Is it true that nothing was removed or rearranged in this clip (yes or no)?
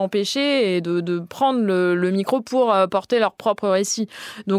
yes